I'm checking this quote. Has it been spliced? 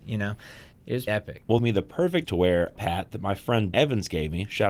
yes; 5 cuts; at 1.1 s, 1.6 s, 2.2 s, 2.8 s, 3.7 s

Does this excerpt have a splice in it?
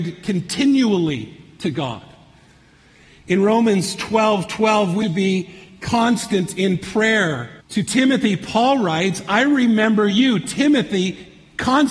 yes; 2 cuts; at 5.0 s, 7.6 s

